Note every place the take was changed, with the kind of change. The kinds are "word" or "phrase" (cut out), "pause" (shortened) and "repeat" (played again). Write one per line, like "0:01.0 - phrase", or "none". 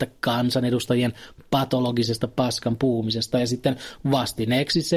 none